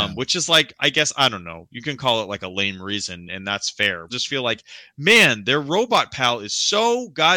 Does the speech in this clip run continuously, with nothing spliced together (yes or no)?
no